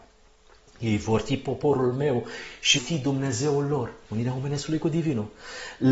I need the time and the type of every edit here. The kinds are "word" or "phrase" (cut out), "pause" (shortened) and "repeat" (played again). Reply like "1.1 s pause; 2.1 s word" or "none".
2.8 s phrase